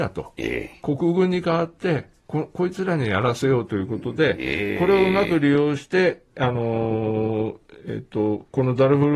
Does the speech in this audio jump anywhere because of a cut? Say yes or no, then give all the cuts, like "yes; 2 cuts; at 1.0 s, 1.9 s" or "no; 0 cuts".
no; 0 cuts